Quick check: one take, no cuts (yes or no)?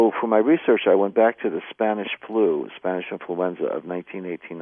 yes